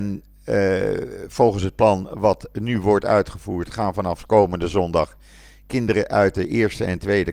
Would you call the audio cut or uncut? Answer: uncut